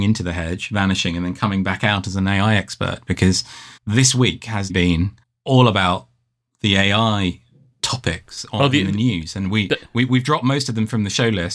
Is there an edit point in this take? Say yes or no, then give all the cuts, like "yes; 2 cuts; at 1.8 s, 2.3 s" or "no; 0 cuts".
yes; 3 cuts; at 3.8 s, 4.7 s, 5.2 s